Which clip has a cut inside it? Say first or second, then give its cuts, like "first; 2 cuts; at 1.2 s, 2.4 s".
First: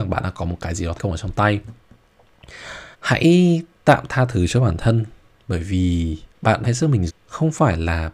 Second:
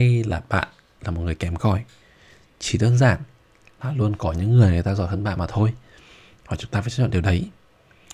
first; 5 cuts; at 1.0 s, 2.9 s, 6.3 s, 6.6 s, 7.1 s